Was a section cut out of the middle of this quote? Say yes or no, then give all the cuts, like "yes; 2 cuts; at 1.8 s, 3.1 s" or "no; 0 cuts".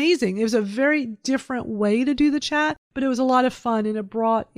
no; 0 cuts